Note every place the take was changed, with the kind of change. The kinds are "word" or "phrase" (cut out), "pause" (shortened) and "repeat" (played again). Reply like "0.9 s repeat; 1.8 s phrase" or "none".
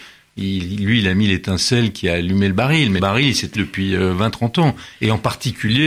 3.0 s word; 3.6 s word